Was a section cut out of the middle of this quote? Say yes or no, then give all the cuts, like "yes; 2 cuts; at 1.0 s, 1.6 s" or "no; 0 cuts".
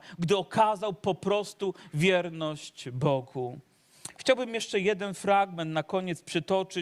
no; 0 cuts